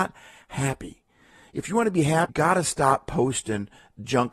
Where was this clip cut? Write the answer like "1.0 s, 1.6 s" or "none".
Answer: 2.3 s